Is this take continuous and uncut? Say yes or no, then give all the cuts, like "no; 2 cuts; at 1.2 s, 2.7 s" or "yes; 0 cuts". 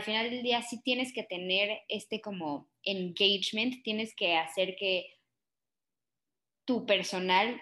yes; 0 cuts